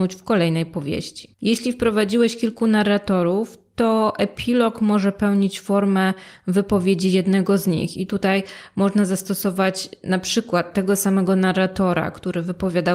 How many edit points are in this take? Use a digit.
1